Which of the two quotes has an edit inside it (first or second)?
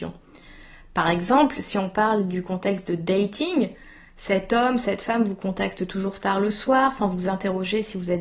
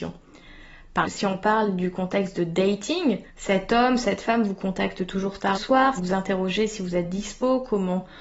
second